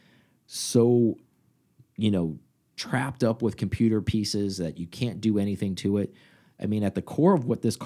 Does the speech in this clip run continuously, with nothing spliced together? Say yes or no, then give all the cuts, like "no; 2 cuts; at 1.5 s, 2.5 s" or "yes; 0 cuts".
yes; 0 cuts